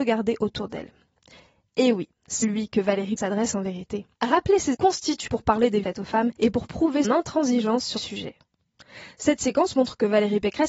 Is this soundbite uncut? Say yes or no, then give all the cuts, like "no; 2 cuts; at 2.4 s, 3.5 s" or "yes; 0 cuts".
no; 9 cuts; at 2.4 s, 3.2 s, 4.1 s, 4.7 s, 5.3 s, 5.8 s, 6.4 s, 7.0 s, 8.0 s